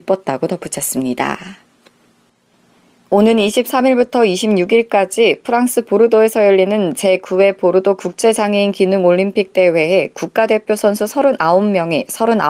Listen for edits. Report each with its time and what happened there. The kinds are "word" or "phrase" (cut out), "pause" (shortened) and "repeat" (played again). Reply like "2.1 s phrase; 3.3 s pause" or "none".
none